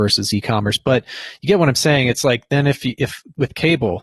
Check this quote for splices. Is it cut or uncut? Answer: uncut